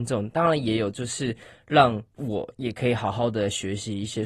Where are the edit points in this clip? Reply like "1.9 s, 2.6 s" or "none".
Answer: 2.1 s